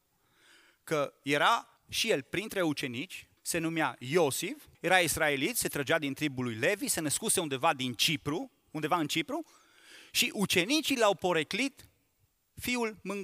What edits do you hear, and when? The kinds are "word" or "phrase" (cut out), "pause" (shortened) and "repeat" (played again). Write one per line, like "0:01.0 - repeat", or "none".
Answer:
0:01.8 - pause
0:03.4 - pause
0:04.7 - pause